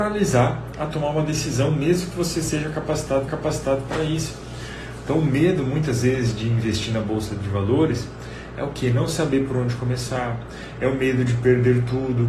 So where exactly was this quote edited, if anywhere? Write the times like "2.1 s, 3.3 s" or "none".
3.3 s